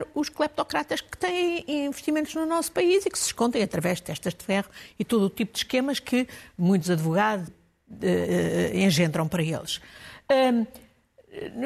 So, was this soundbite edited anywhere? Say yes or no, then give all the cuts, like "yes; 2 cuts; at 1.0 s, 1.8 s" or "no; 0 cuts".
yes; 1 cut; at 7.5 s